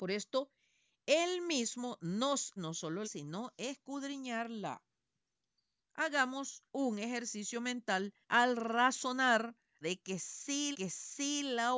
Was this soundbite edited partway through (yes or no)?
yes